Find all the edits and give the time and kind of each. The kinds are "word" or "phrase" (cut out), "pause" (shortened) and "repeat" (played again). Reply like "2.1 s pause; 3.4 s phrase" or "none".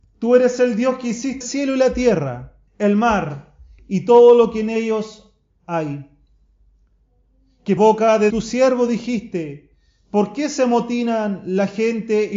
1.4 s word; 2.7 s pause; 7.8 s word; 8.3 s word